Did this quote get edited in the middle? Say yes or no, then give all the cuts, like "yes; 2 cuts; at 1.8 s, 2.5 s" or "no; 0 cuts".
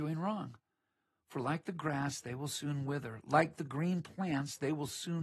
no; 0 cuts